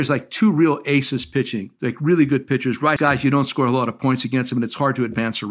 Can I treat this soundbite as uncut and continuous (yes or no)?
no